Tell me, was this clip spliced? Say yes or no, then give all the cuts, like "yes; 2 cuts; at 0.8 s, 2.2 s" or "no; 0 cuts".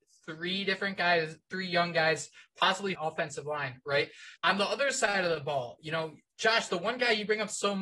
yes; 2 cuts; at 2.9 s, 4.4 s